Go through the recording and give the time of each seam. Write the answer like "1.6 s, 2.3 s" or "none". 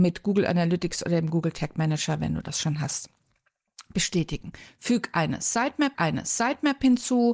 5.9 s